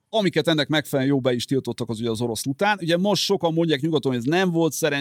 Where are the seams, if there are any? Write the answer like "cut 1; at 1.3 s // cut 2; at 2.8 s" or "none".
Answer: cut 1; at 2.4 s